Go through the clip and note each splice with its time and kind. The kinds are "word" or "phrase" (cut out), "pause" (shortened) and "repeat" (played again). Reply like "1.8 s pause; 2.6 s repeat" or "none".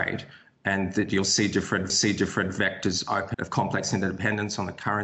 1.9 s repeat; 3.3 s word